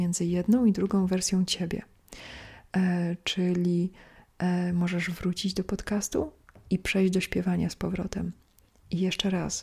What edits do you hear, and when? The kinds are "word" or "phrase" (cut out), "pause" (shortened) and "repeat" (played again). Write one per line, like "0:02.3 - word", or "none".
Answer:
none